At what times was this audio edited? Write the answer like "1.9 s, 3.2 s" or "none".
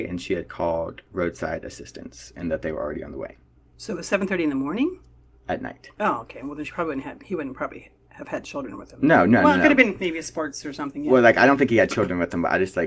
none

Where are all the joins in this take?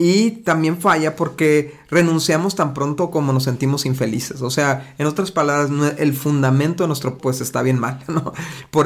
7.2 s

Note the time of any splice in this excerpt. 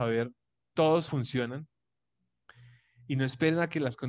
1.1 s

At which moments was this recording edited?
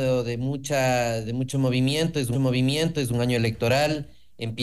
2.3 s

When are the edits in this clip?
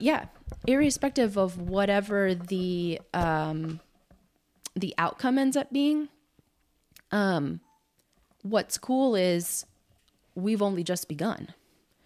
none

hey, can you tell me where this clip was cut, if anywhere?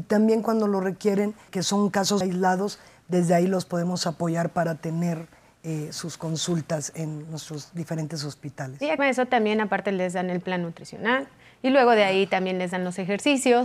1.5 s, 2.2 s, 9.0 s

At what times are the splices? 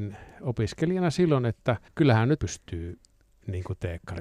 1.9 s, 2.4 s

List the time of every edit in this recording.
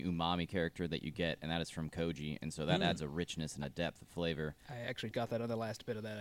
5.1 s

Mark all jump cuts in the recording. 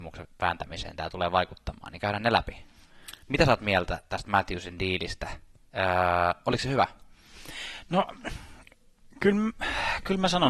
3.2 s

